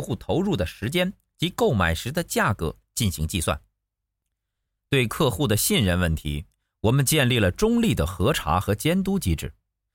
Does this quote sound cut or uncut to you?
uncut